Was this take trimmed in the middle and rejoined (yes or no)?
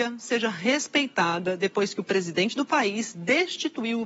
no